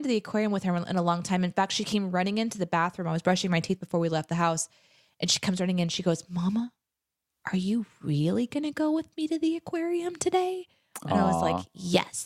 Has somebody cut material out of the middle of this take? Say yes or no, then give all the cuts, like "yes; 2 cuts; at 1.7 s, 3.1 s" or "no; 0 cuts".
no; 0 cuts